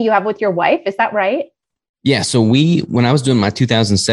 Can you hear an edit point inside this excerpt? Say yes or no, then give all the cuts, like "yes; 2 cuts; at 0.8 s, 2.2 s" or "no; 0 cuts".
no; 0 cuts